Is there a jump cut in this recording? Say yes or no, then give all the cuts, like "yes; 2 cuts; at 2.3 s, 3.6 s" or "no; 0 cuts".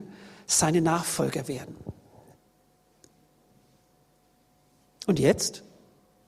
no; 0 cuts